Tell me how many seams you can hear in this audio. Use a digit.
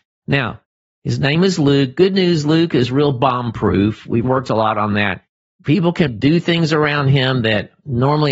2